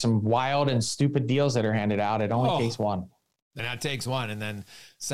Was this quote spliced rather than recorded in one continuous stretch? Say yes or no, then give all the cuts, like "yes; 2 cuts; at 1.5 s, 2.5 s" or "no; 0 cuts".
yes; 1 cut; at 3.6 s